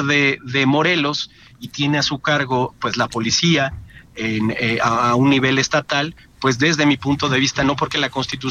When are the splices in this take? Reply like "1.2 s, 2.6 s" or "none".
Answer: none